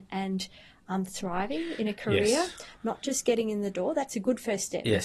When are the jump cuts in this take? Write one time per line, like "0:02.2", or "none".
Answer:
none